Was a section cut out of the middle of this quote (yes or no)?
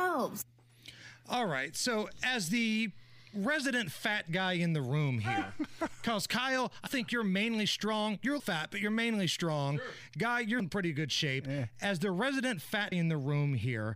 yes